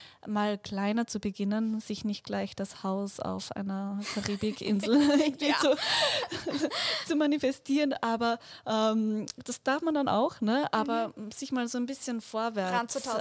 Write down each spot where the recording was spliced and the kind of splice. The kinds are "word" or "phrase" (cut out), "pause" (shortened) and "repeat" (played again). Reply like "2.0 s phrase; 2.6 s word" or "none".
none